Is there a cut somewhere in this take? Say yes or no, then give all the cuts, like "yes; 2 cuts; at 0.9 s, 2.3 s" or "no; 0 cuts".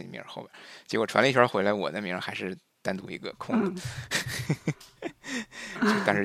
no; 0 cuts